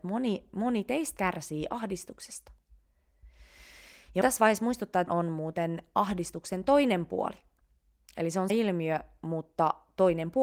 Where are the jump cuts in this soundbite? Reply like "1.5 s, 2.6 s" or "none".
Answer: 1.2 s, 4.2 s, 5.1 s, 8.5 s